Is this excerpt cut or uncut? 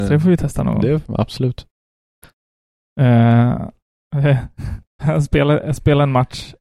uncut